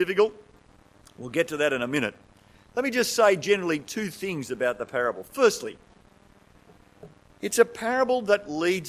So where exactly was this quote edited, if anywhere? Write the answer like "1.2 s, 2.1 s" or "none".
none

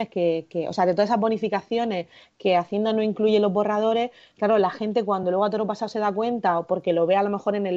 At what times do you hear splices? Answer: none

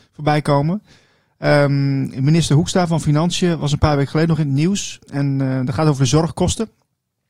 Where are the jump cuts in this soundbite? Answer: none

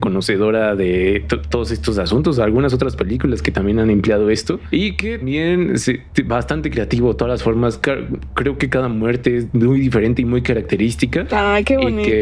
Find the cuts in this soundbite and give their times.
5.2 s

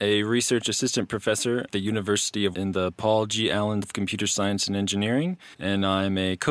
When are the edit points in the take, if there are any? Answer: 1.7 s, 2.5 s, 3.8 s, 5.5 s

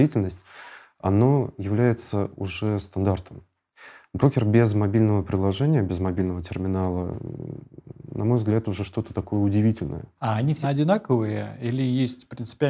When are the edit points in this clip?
8.6 s, 10.6 s

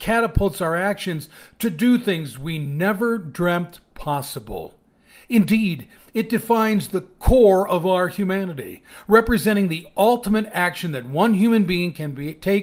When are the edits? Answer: none

